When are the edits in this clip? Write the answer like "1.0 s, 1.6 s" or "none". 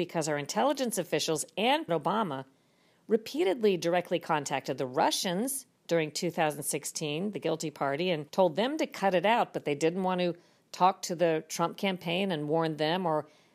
1.9 s, 5.8 s, 8.3 s